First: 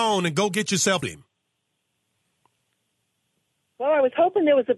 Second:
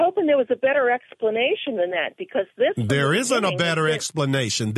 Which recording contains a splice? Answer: first; 1 cut; at 1.0 s

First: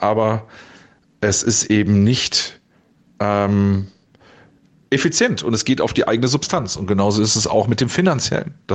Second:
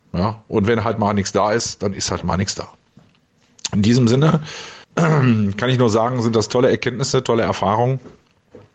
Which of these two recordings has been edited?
second; 1 cut; at 4.8 s

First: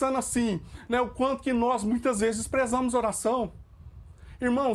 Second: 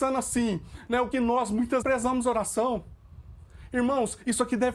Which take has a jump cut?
second; 2 cuts; at 1.1 s, 1.8 s

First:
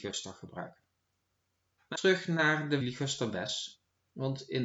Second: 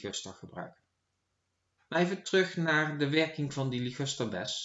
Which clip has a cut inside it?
first; 2 cuts; at 1.9 s, 2.8 s

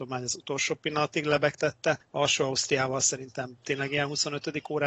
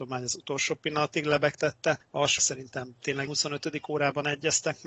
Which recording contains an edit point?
second; 2 cuts; at 2.4 s, 3.3 s

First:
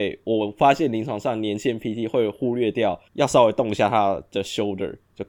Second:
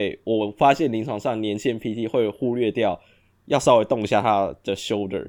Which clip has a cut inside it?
first; 1 cut; at 3.1 s

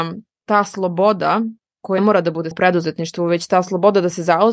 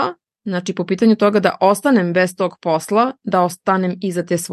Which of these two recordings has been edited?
first; 2 cuts; at 2.0 s, 2.5 s

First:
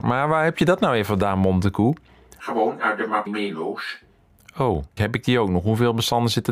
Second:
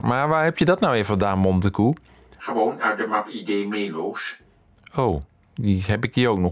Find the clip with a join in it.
first; 2 cuts; at 3.3 s, 5.0 s

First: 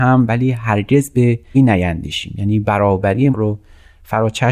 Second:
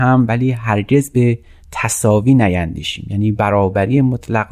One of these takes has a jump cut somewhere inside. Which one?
first; 2 cuts; at 1.5 s, 3.3 s

